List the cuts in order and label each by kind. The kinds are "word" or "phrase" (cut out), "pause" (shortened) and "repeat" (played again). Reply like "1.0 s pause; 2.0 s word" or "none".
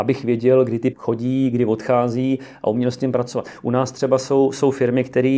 0.9 s word